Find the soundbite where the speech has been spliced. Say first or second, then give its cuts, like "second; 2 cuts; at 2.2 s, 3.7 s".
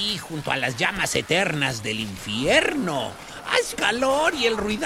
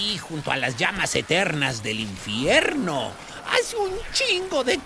first; 1 cut; at 3.7 s